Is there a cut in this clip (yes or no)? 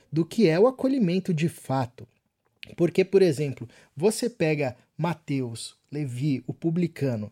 no